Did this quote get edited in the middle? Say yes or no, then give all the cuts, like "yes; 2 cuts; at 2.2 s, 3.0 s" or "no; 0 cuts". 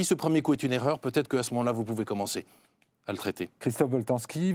no; 0 cuts